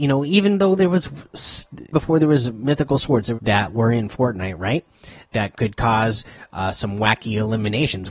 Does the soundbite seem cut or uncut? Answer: cut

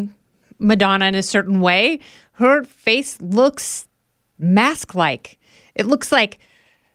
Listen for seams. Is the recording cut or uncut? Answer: uncut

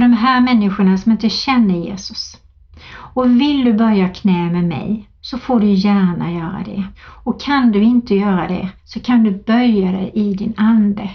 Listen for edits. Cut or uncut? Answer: cut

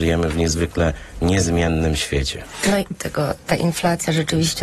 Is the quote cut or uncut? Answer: cut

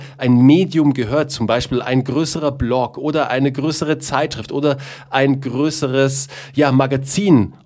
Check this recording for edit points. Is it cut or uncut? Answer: uncut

